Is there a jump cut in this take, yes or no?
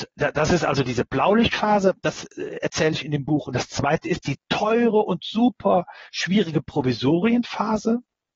no